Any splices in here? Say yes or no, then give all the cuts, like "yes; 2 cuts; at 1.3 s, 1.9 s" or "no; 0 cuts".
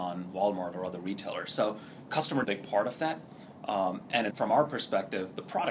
yes; 2 cuts; at 2.4 s, 4.3 s